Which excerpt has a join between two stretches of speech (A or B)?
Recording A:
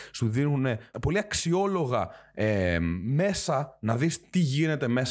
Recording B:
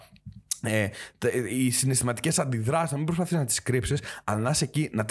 A